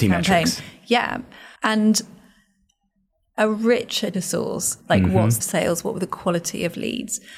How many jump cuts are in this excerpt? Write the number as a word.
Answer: four